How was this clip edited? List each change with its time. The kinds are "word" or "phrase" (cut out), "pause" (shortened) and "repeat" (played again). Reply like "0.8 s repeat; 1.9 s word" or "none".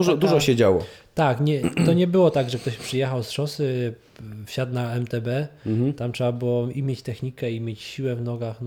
none

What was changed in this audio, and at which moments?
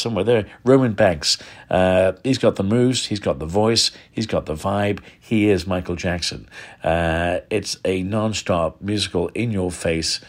none

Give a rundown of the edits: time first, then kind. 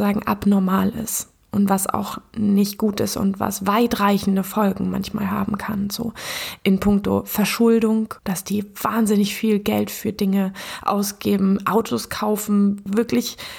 8.2 s pause

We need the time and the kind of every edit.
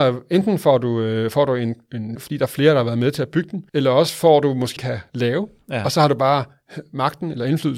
2.2 s phrase; 3.7 s pause; 4.8 s phrase

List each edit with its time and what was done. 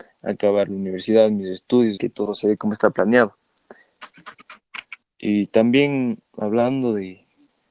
2.0 s word; 5.0 s pause; 6.3 s pause

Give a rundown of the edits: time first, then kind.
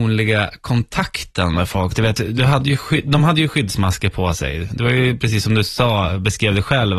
none

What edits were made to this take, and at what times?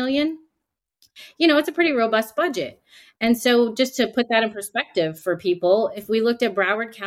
none

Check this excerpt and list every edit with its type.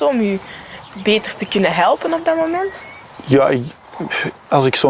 none

